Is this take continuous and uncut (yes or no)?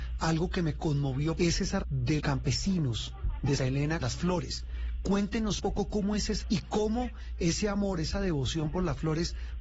no